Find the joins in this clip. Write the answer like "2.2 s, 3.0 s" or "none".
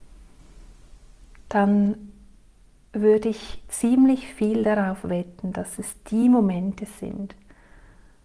none